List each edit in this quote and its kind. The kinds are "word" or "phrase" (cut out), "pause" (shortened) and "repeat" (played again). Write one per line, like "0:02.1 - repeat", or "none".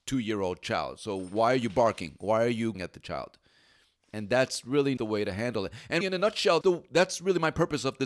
0:02.7 - word
0:05.0 - word
0:06.0 - word
0:06.6 - word